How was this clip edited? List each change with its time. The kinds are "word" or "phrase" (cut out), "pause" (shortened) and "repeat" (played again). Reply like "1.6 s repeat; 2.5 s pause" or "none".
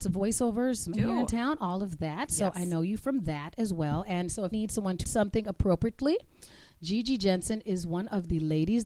0.9 s word; 4.5 s word; 5.0 s word